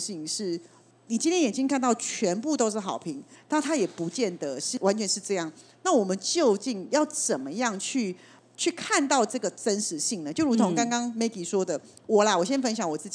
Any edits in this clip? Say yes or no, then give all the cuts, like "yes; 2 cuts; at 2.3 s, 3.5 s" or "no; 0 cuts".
no; 0 cuts